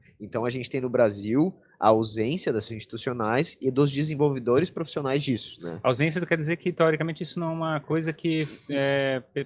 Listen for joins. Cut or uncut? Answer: cut